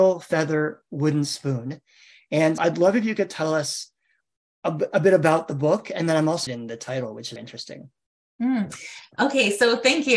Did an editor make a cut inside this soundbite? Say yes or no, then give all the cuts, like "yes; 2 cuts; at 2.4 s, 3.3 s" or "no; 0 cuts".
yes; 3 cuts; at 2.6 s, 6.5 s, 7.4 s